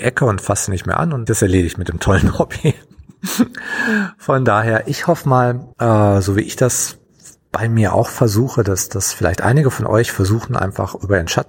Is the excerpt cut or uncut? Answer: cut